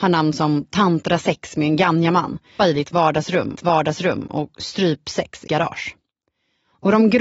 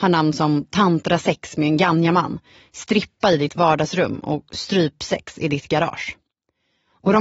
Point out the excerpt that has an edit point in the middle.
first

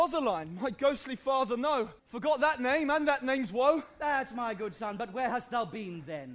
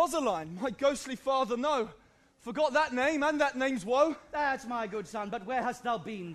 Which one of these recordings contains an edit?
first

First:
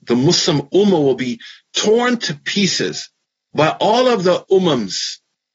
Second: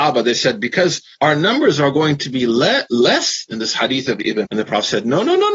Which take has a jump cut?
second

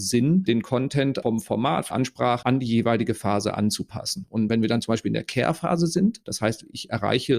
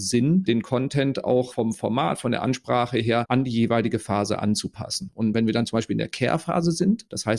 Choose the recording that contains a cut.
first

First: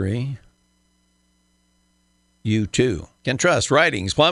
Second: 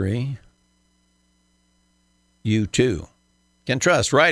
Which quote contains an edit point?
first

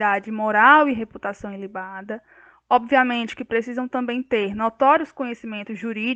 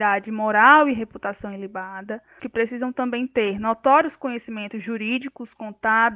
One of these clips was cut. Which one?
second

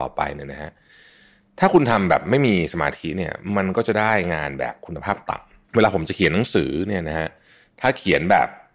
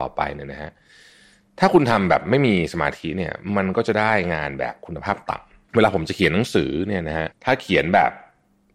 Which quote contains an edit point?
second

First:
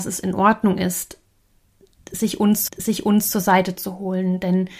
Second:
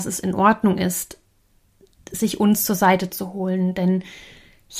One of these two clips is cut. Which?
first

